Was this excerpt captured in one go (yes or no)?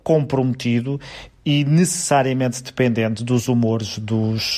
yes